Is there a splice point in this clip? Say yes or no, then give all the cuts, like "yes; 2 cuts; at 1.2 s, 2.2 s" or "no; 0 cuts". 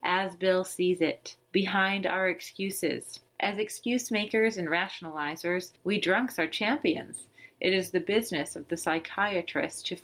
yes; 3 cuts; at 1.4 s, 3.3 s, 5.8 s